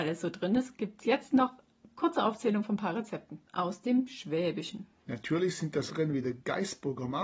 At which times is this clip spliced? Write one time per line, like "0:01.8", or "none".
0:03.5
0:05.9